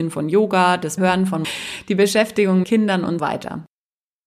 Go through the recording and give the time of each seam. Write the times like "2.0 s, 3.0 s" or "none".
1.0 s, 1.4 s, 2.6 s, 3.2 s